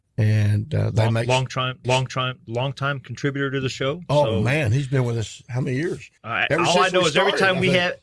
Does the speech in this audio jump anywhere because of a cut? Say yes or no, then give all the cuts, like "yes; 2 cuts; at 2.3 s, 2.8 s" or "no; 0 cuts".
yes; 2 cuts; at 1.8 s, 6.2 s